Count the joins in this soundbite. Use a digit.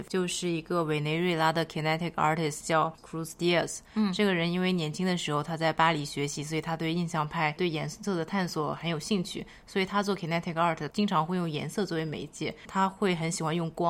1